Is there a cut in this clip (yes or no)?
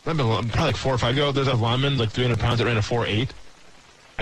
yes